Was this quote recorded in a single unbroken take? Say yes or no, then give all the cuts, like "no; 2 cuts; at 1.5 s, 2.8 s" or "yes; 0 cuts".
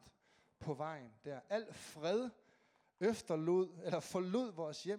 yes; 0 cuts